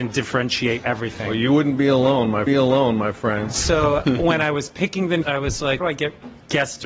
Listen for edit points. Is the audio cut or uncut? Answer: cut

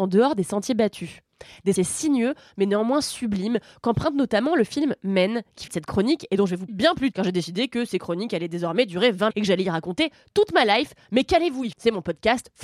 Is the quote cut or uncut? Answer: cut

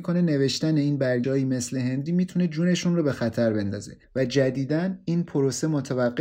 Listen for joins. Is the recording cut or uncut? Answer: cut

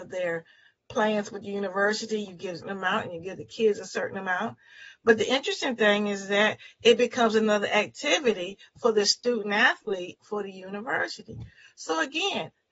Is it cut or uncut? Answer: cut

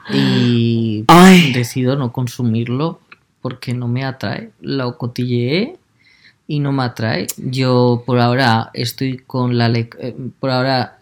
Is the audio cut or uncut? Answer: uncut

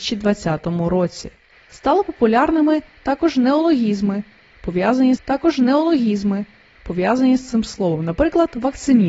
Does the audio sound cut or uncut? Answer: cut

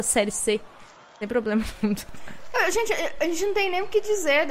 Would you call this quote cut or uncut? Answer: uncut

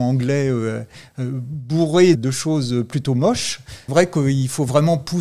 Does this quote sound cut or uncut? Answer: cut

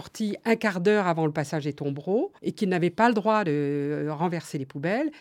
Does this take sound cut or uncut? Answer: cut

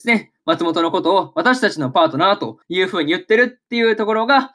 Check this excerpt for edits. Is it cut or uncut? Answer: cut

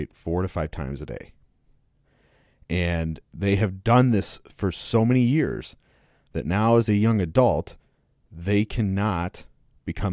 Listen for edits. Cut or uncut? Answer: uncut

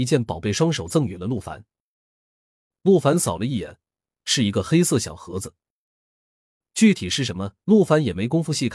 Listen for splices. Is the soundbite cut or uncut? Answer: uncut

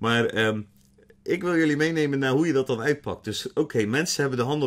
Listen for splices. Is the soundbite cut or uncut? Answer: uncut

